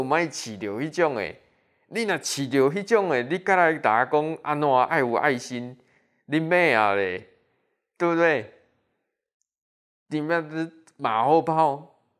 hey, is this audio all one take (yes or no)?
yes